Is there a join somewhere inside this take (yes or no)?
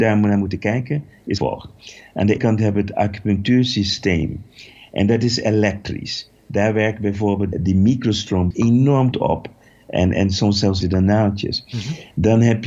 yes